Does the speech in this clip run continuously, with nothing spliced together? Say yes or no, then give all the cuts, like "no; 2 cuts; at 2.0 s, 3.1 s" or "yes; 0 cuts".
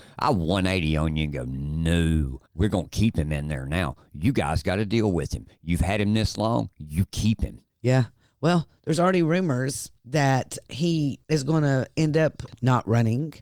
no; 4 cuts; at 2.5 s, 7.7 s, 10.0 s, 11.2 s